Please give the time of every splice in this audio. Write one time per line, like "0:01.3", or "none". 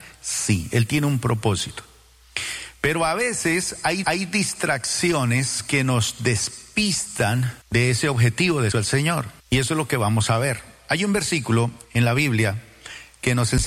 0:04.0
0:07.6
0:08.7
0:09.4
0:11.8